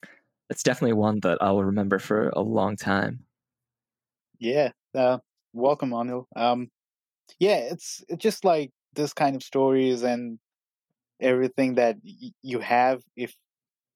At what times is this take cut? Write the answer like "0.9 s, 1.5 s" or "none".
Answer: none